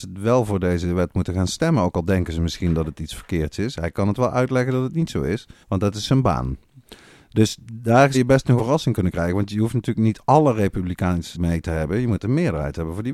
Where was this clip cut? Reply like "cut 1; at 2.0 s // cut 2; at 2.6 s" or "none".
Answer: cut 1; at 5.6 s // cut 2; at 8.1 s // cut 3; at 8.6 s // cut 4; at 11.3 s